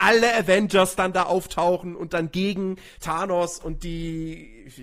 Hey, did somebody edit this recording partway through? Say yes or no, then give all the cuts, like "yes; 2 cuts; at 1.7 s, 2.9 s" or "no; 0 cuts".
no; 0 cuts